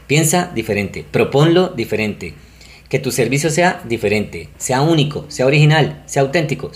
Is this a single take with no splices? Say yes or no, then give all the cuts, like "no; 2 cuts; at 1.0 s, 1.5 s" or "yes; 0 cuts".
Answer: yes; 0 cuts